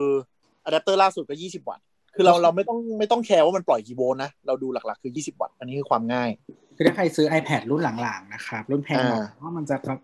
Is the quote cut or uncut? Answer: uncut